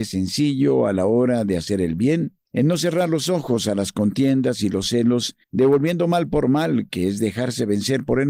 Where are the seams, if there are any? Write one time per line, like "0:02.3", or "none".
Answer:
0:02.5
0:05.4